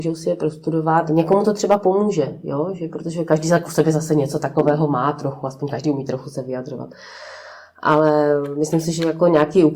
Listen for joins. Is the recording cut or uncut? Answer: uncut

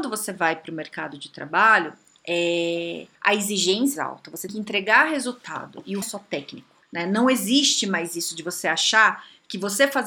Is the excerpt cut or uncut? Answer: cut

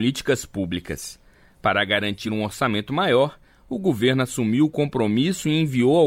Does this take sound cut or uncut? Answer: uncut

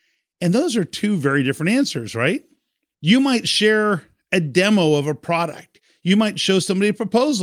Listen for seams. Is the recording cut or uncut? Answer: uncut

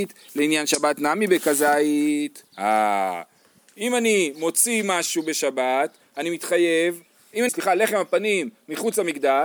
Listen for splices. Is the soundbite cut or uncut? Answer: cut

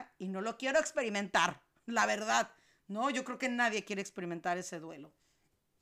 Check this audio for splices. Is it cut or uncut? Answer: uncut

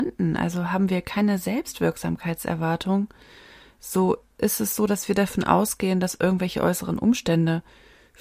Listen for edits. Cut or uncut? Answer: uncut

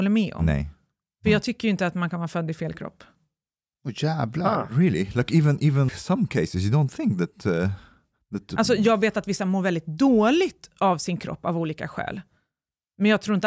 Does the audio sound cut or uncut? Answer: cut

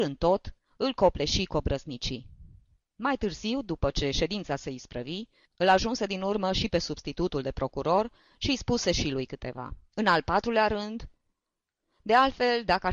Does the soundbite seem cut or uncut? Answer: uncut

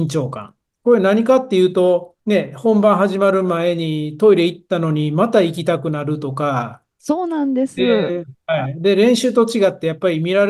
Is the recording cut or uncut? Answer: cut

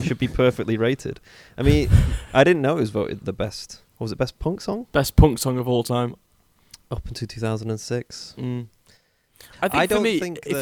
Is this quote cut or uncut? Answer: cut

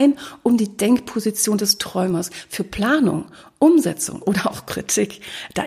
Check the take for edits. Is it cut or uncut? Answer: uncut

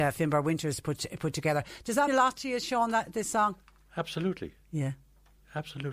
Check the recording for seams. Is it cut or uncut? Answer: cut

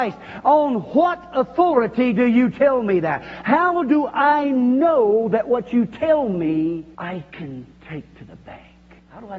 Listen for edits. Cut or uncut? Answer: uncut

